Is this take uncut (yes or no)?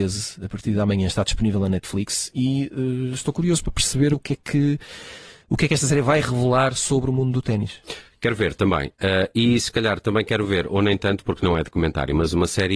yes